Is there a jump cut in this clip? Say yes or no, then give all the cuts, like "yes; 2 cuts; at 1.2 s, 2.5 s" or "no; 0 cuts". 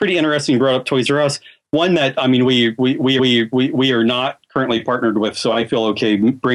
yes; 1 cut; at 3.2 s